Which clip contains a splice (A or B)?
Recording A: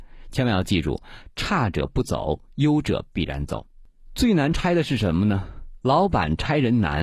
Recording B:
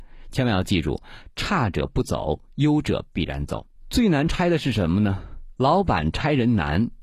B